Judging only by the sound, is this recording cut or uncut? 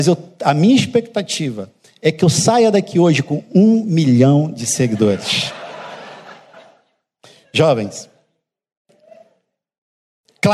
uncut